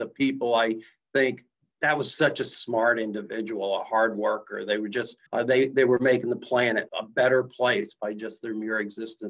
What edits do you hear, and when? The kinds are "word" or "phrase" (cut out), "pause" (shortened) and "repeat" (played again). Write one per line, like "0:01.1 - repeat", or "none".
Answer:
0:05.3 - pause
0:06.9 - word